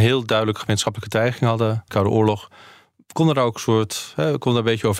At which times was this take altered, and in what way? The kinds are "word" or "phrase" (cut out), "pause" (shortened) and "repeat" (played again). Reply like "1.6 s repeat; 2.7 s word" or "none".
1.9 s word